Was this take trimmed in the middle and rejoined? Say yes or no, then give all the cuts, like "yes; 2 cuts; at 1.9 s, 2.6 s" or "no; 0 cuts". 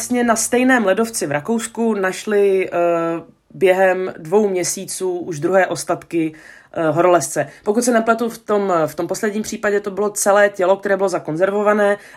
no; 0 cuts